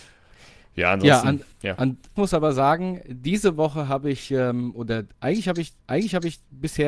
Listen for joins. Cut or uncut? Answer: cut